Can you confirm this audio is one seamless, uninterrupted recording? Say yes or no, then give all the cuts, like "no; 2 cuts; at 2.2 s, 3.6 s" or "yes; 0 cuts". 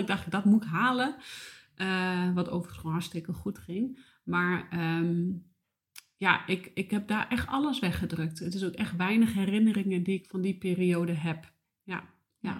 yes; 0 cuts